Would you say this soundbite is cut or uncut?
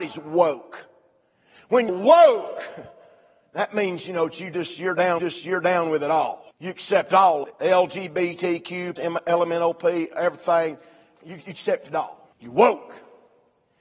cut